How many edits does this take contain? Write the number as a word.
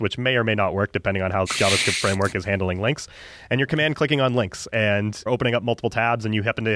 two